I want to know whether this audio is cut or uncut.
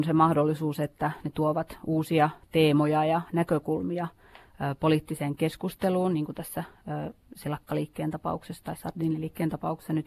uncut